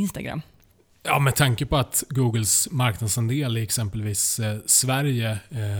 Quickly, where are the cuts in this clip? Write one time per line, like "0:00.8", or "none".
none